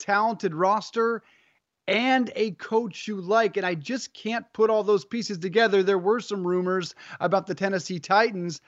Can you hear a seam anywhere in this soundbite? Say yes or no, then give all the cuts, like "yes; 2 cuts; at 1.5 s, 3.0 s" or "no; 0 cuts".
no; 0 cuts